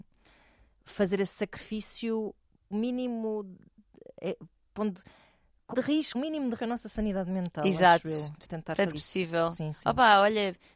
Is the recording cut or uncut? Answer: cut